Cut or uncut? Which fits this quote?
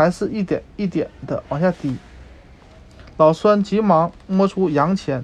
uncut